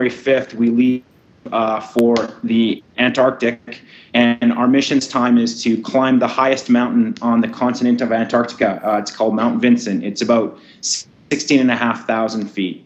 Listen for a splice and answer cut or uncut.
uncut